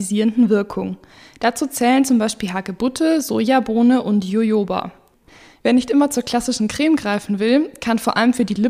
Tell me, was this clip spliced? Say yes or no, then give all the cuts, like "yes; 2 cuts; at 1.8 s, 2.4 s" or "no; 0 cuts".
no; 0 cuts